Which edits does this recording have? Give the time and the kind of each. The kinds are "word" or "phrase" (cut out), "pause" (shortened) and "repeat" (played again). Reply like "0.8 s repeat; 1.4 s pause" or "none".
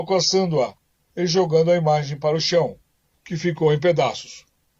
none